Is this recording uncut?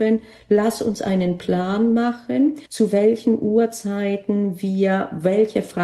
no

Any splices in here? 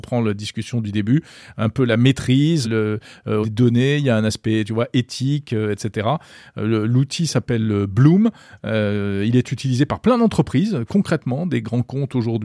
yes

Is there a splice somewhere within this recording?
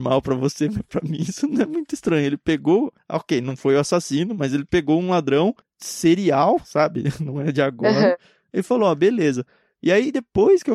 no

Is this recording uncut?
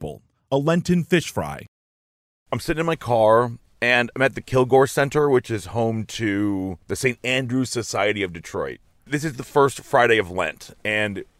yes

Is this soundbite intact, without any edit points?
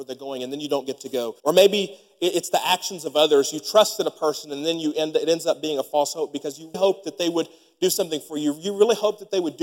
no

